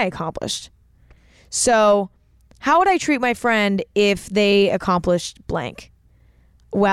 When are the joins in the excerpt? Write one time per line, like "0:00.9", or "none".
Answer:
none

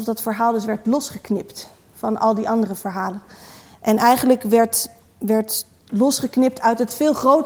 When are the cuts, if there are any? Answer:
none

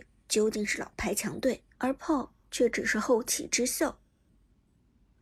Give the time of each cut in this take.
0:01.7
0:02.4

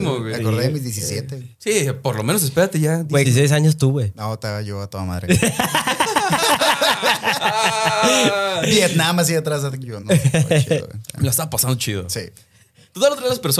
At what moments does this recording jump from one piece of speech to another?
0:01.5
0:03.2
0:10.0

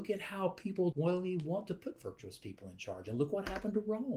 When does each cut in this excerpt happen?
0:00.9

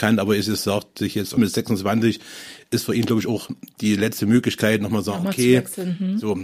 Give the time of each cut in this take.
0:01.4

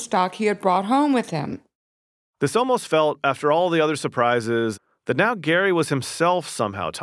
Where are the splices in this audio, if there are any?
none

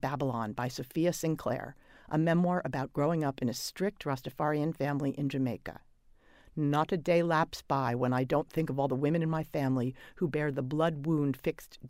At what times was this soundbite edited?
none

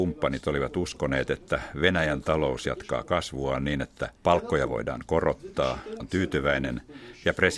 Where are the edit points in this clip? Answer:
0:04.2
0:06.0

